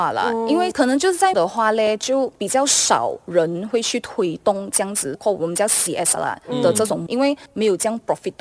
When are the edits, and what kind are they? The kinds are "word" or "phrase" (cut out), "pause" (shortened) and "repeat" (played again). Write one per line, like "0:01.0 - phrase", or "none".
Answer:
0:01.3 - word
0:05.1 - word
0:06.2 - word
0:07.1 - word